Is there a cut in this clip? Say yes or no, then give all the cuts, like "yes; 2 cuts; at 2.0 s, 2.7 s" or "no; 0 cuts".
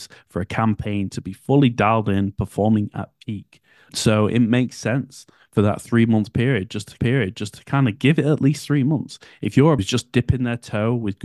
yes; 3 cuts; at 3.9 s, 7.0 s, 9.8 s